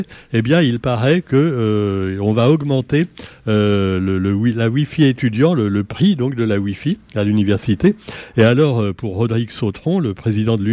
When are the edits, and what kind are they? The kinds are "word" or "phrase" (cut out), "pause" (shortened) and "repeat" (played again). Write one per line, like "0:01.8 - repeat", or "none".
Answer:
none

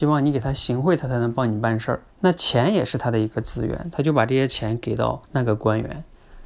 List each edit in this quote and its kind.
0:02.1 - pause
0:05.2 - pause

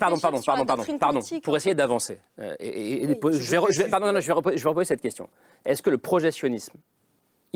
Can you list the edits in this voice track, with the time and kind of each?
none

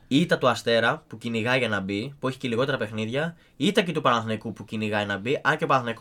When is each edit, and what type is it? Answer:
none

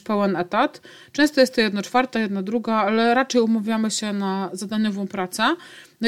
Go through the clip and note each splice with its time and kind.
none

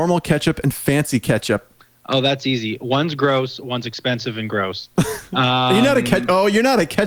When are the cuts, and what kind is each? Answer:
0:01.8 - pause

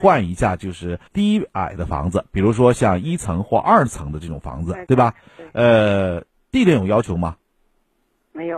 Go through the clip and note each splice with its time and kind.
0:01.1 - pause

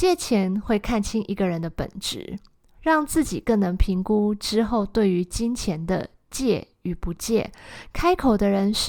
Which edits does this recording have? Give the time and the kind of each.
none

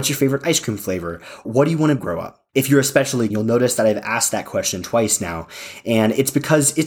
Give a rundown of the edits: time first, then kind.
0:01.4 - word
0:02.0 - phrase
0:02.5 - pause
0:03.3 - word

